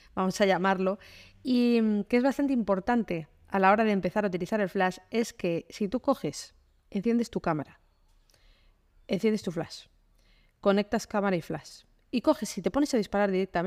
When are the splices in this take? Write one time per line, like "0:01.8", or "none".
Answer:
none